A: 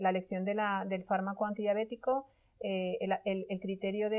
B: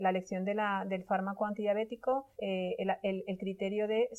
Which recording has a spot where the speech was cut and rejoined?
B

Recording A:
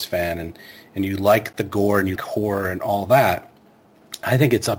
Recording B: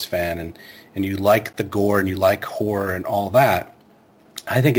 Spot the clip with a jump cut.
A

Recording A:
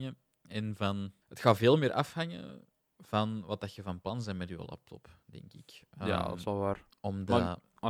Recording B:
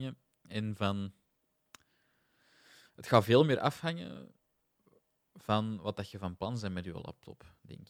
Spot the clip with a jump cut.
A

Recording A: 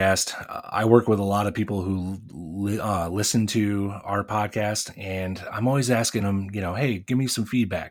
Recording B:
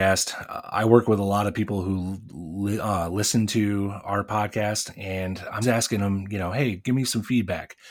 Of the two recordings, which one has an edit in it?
B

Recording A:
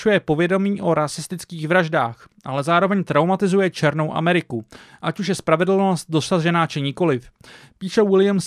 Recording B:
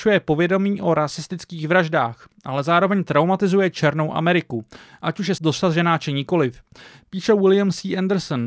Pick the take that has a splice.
B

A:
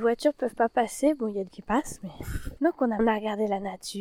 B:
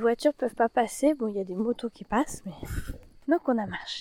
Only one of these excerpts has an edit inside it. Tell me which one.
A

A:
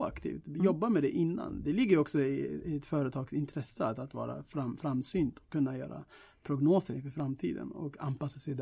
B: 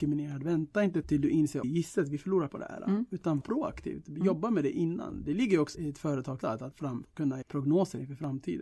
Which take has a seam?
B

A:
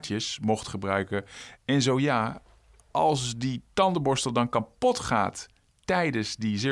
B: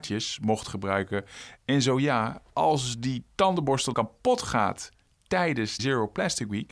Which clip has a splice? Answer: B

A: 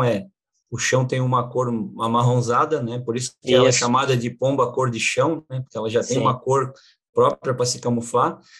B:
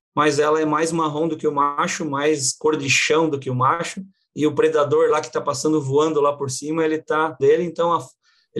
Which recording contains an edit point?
B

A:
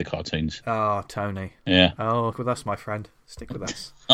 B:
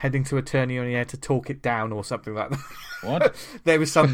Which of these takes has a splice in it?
A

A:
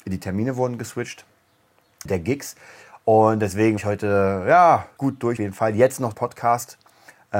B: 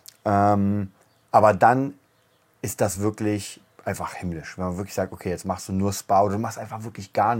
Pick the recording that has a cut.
A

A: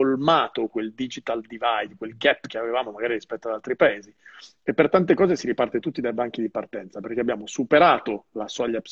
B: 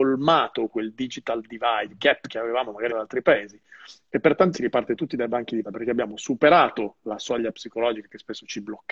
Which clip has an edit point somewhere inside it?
B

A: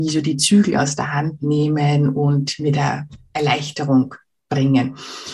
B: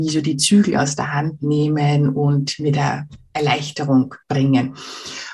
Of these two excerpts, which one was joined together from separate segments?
B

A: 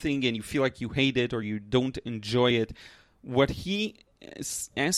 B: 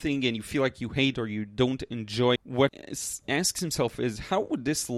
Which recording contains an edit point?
B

